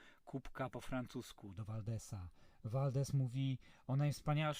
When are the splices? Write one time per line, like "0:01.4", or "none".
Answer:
none